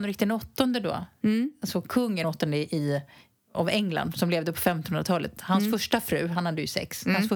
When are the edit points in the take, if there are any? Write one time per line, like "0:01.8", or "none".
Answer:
0:02.2